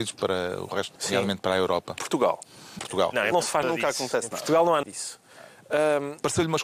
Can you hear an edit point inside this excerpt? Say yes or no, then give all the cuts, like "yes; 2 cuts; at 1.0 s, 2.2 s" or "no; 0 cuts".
yes; 6 cuts; at 1.0 s, 2.0 s, 2.8 s, 3.3 s, 3.6 s, 4.8 s